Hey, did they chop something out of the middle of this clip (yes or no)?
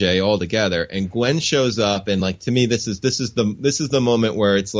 no